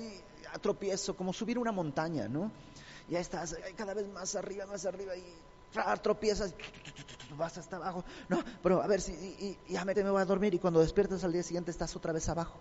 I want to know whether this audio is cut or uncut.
cut